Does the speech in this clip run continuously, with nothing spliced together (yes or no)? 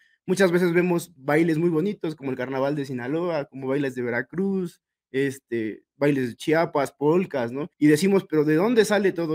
no